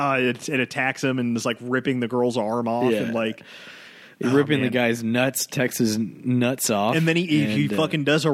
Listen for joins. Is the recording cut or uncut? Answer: uncut